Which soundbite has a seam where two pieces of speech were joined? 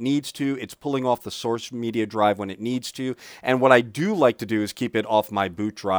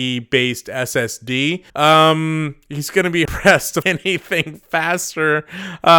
second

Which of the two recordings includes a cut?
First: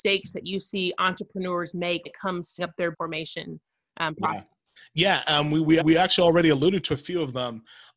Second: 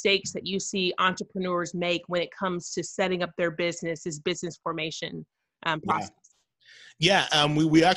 first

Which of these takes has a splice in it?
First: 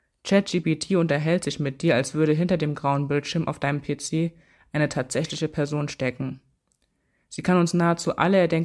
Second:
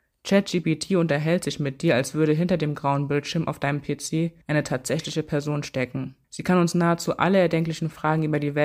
second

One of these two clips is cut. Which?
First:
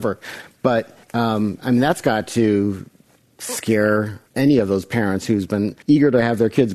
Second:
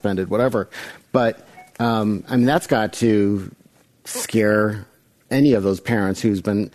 first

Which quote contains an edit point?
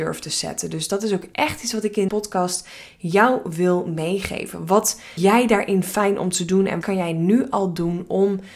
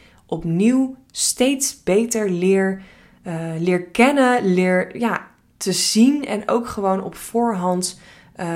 first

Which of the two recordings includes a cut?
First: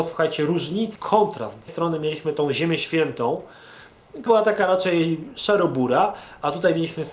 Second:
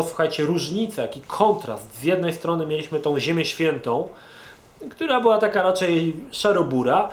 first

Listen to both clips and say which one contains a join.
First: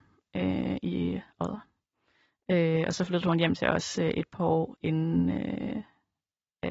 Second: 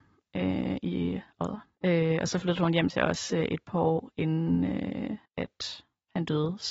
second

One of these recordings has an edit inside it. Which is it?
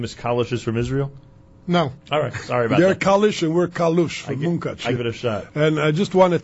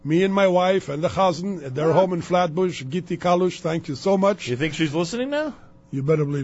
first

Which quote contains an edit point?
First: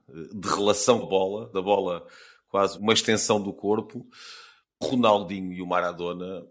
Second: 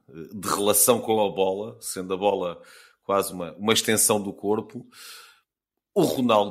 first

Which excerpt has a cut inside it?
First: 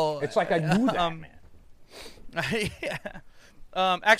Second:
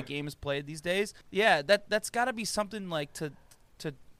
second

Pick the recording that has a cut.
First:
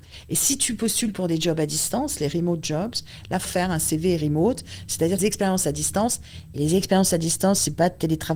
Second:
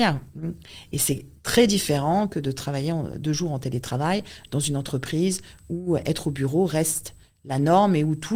first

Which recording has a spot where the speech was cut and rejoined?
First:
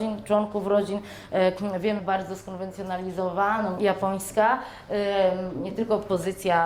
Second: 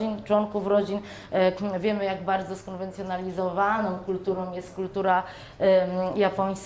first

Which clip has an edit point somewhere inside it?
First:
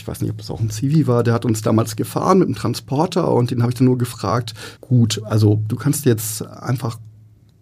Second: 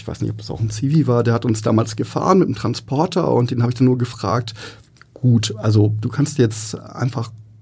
first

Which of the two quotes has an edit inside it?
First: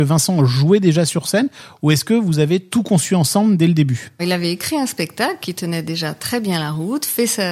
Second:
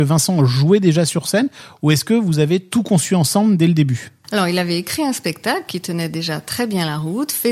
first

